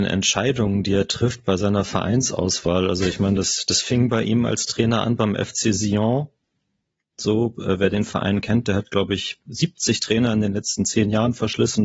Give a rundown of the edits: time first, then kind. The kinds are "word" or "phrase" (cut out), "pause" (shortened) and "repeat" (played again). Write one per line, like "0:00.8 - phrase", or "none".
none